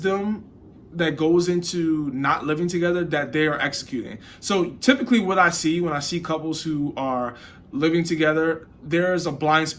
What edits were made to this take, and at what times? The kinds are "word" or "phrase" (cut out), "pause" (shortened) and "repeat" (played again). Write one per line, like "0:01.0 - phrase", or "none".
none